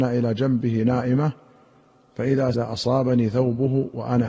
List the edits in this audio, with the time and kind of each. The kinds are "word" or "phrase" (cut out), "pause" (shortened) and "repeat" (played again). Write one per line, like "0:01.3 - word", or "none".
0:02.5 - word